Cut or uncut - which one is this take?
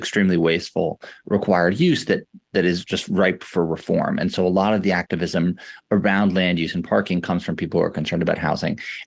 cut